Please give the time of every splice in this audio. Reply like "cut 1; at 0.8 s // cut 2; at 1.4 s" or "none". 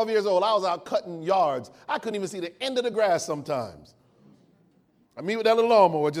none